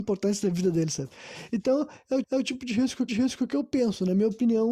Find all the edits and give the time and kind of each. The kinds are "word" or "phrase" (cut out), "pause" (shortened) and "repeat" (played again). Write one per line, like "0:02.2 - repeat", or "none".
0:02.2 - repeat
0:03.1 - repeat